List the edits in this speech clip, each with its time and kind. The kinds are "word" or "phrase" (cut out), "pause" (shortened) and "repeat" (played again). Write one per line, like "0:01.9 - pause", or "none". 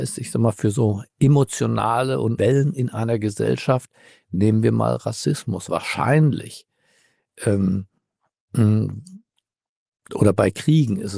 0:02.4 - word

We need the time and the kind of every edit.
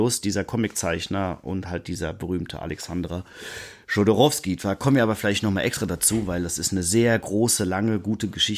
none

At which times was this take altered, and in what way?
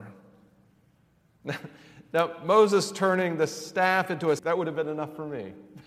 0:04.4 - word

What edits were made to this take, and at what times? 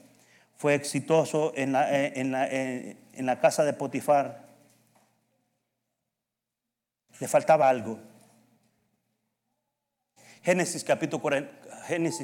none

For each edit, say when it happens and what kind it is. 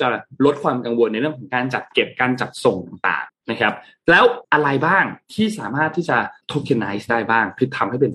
0:03.3 - pause
0:04.4 - pause
0:06.4 - pause

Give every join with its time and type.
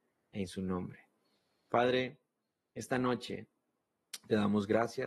none

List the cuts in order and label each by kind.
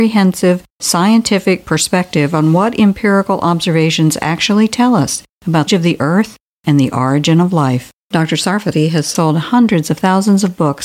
0:05.7 - phrase
0:08.0 - pause

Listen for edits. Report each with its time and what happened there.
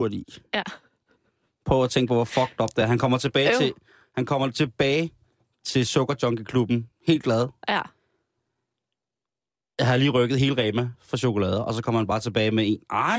none

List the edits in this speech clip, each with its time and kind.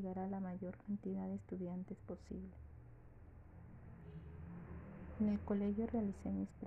none

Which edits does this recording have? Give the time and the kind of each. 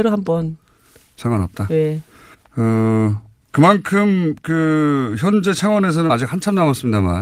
0:02.3 - pause
0:06.1 - word

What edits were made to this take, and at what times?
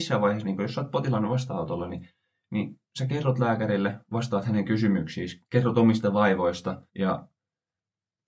0:02.9 - pause
0:05.4 - pause
0:06.9 - pause

